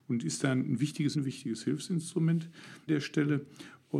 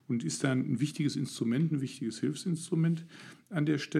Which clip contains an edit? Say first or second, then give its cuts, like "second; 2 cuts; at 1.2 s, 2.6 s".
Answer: first; 2 cuts; at 1.1 s, 2.9 s